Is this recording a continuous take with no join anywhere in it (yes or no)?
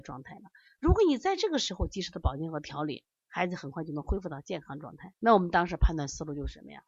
no